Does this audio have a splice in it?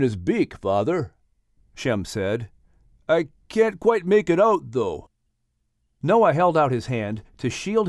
no; 0 cuts

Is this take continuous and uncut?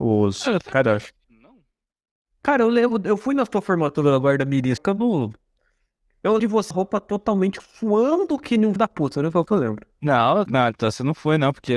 no; 7 cuts; at 4.8 s, 6.4 s, 6.7 s, 7.6 s, 8.8 s, 9.5 s, 10.5 s

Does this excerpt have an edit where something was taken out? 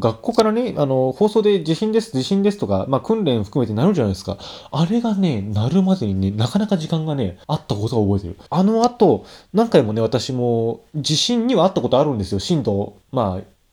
yes; 2 cuts; at 7.4 s, 8.5 s

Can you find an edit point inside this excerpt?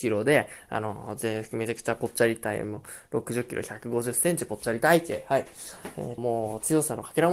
yes; 1 cut; at 6.2 s

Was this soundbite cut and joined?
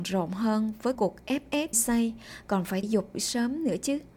yes; 4 cuts; at 1.0 s, 1.7 s, 2.8 s, 3.1 s

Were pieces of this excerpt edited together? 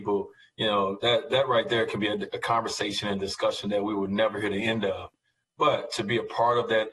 no; 0 cuts

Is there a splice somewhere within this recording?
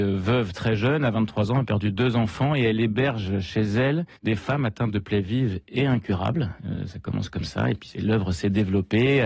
yes; 1 cut; at 4.2 s

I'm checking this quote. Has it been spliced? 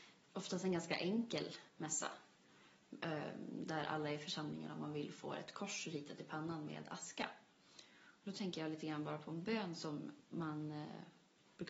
yes; 1 cut; at 1.7 s

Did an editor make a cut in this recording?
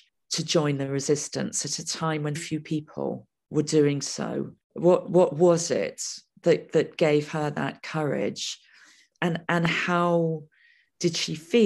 yes; 1 cut; at 2.4 s

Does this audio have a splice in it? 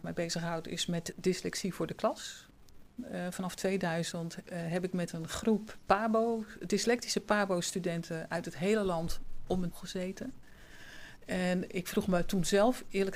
yes; 1 cut; at 9.7 s

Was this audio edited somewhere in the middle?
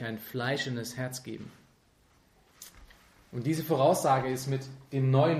no; 0 cuts

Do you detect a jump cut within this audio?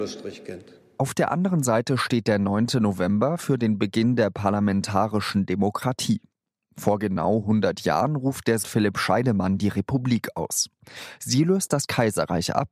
yes; 1 cut; at 8.6 s

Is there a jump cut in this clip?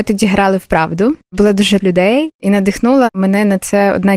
yes; 1 cut; at 1.8 s

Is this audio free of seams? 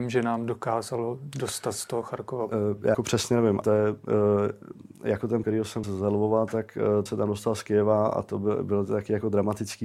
no; 5 cuts; at 2.9 s, 3.6 s, 5.4 s, 5.8 s, 7.1 s

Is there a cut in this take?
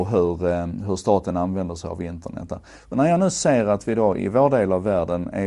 yes; 1 cut; at 4.2 s

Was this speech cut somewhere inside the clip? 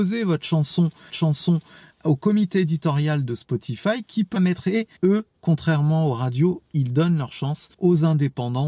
yes; 4 cuts; at 1.1 s, 4.4 s, 5.0 s, 7.7 s

